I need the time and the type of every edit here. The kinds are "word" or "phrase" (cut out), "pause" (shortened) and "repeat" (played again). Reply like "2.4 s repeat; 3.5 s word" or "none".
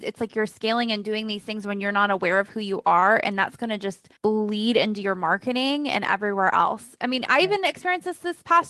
4.2 s pause

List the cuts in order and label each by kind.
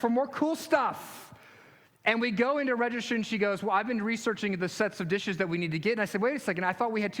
none

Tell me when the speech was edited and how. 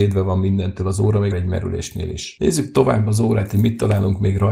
1.3 s word

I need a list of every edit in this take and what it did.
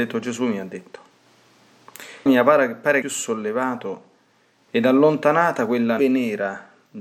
2.3 s word; 3.0 s phrase; 6.0 s word

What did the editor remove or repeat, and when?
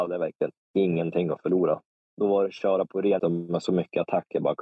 2.0 s pause; 2.5 s word; 3.2 s word

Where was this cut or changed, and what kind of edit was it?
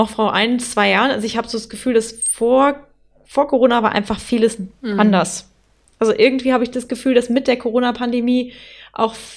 none

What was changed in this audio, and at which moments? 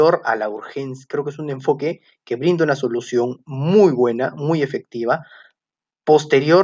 none

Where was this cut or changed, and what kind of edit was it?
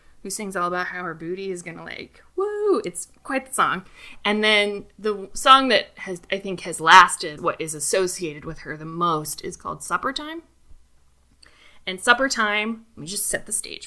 7.4 s phrase

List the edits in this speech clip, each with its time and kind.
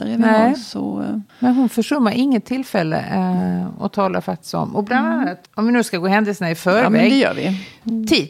1.3 s pause; 5.5 s pause

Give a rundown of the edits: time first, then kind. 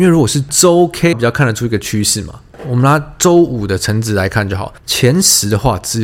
1.1 s phrase; 4.8 s pause

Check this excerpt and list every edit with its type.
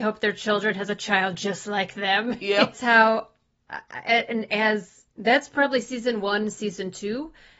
2.7 s phrase; 5.1 s pause

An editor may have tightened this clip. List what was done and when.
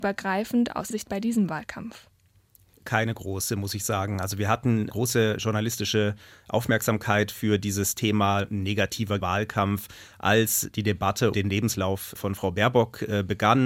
0.9 s word; 4.9 s word; 9.2 s word; 11.3 s word; 12.2 s word

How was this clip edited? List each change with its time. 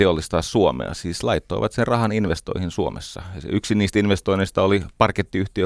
none

